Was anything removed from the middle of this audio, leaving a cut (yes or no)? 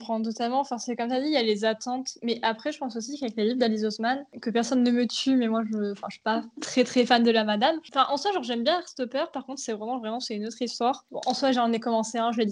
no